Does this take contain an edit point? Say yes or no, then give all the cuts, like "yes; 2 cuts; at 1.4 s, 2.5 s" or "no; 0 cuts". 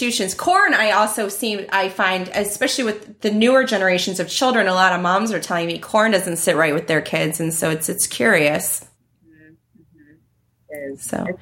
yes; 1 cut; at 8.9 s